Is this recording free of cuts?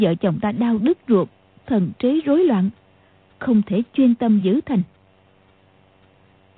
yes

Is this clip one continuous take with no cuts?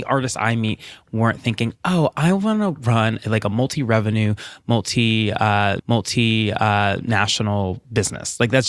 no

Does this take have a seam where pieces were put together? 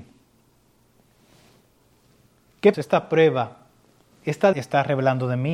yes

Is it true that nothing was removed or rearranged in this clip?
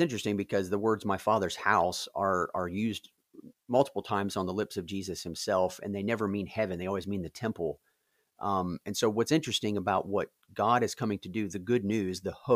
yes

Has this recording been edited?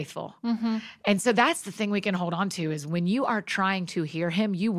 no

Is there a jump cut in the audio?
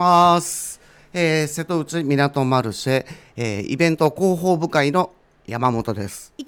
no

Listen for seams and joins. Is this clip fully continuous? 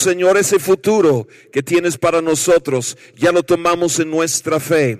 yes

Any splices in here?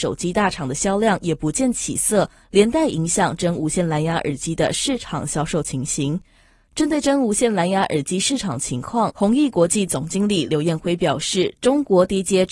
no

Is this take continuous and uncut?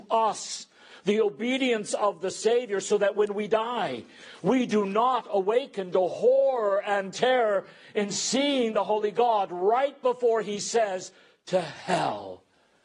yes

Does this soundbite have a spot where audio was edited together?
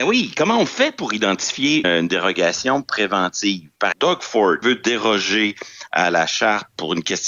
yes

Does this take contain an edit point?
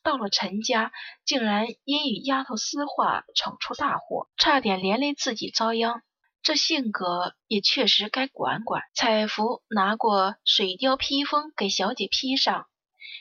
yes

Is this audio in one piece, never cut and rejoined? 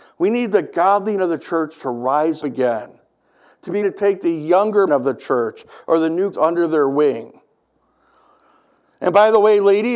no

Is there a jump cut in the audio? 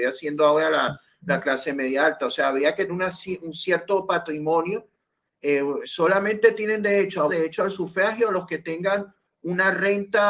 yes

